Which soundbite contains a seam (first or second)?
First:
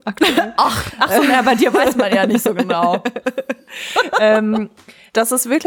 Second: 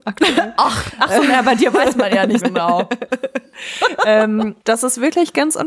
second